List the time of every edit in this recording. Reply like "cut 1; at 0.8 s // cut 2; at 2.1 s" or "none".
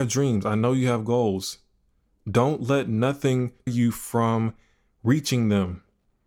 cut 1; at 3.7 s